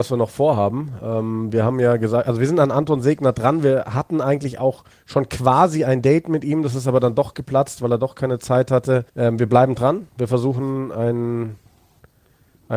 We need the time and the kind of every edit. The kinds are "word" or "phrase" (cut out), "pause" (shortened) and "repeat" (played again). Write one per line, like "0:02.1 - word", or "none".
0:04.9 - pause
0:09.1 - pause